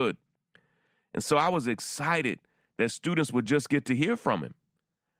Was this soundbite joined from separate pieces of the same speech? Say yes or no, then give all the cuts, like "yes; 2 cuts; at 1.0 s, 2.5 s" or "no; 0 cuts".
no; 0 cuts